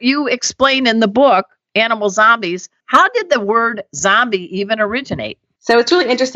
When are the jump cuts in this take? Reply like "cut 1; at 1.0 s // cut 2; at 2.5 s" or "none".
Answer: none